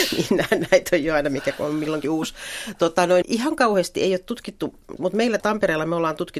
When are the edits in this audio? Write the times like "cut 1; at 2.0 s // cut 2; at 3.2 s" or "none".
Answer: cut 1; at 2.0 s // cut 2; at 3.2 s // cut 3; at 5.0 s // cut 4; at 5.4 s